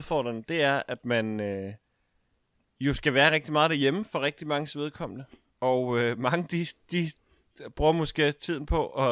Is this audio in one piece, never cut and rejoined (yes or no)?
yes